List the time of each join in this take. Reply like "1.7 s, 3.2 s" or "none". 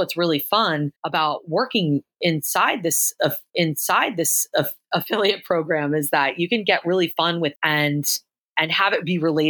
1.0 s, 3.5 s, 7.6 s